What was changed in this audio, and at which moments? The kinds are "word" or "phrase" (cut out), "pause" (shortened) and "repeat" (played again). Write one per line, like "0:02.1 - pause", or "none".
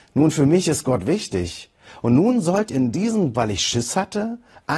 0:02.7 - word
0:03.3 - phrase